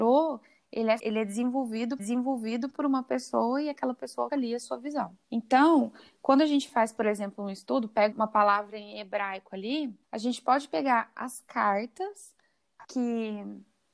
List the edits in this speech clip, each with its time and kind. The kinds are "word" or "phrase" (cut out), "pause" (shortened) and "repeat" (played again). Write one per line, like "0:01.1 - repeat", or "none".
0:01.0 - word
0:02.0 - repeat
0:04.3 - word
0:05.2 - pause
0:08.1 - word
0:10.0 - pause